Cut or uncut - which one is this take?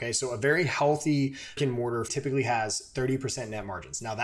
cut